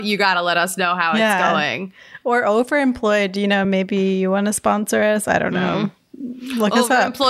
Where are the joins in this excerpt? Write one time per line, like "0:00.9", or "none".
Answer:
none